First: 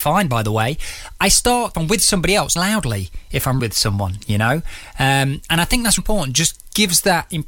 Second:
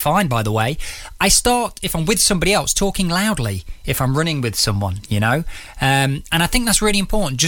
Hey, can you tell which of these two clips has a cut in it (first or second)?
first